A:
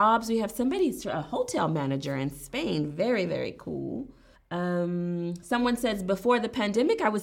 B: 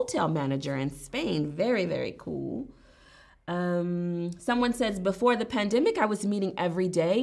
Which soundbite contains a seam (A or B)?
A